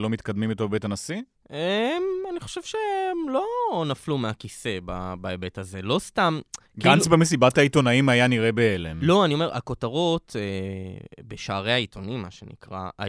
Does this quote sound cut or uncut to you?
cut